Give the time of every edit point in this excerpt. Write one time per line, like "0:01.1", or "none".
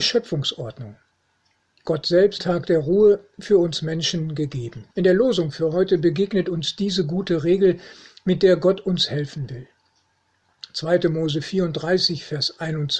0:02.4
0:04.9